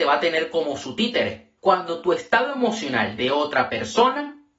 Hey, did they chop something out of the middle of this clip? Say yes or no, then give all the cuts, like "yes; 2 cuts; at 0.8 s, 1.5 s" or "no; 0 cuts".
yes; 2 cuts; at 1.6 s, 3.2 s